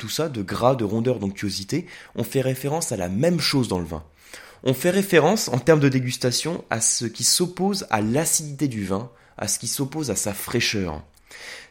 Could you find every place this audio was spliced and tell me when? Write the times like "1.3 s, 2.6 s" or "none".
none